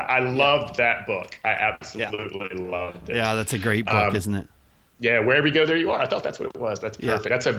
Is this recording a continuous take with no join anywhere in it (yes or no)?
yes